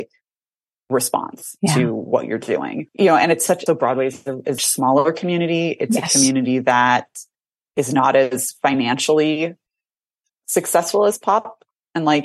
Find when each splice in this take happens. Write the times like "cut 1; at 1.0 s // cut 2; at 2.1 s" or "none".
cut 1; at 3.7 s // cut 2; at 4.6 s // cut 3; at 7.7 s